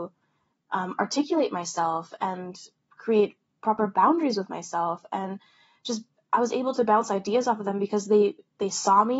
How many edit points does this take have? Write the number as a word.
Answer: zero